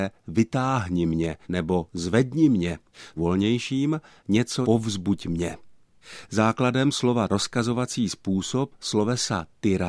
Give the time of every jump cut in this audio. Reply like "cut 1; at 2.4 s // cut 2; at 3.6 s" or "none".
cut 1; at 1.4 s // cut 2; at 3.2 s // cut 3; at 4.6 s // cut 4; at 7.3 s